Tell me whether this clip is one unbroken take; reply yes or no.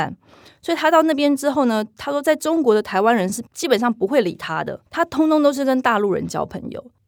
no